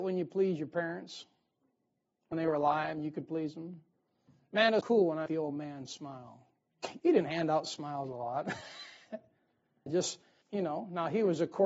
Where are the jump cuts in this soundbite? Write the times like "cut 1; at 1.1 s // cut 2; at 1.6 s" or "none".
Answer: cut 1; at 2.3 s // cut 2; at 4.8 s // cut 3; at 5.3 s // cut 4; at 7.0 s // cut 5; at 9.9 s // cut 6; at 10.4 s